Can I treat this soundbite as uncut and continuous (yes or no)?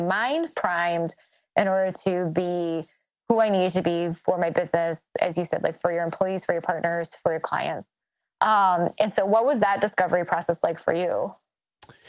yes